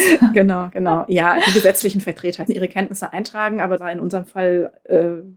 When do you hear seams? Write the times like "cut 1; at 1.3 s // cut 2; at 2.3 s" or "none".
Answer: cut 1; at 2.5 s // cut 2; at 3.8 s